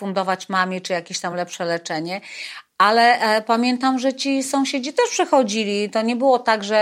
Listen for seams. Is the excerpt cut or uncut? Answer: uncut